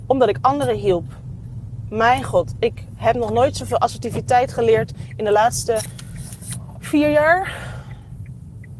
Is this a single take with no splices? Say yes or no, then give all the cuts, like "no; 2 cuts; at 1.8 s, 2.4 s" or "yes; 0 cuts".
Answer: yes; 0 cuts